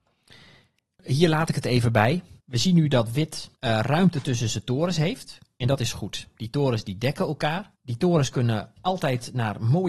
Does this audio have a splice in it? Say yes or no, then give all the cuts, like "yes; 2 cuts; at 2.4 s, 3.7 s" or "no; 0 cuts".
yes; 3 cuts; at 2.4 s, 3.5 s, 7.7 s